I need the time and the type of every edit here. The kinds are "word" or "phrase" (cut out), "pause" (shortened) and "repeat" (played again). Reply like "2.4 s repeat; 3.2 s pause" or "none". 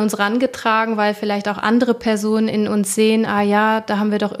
none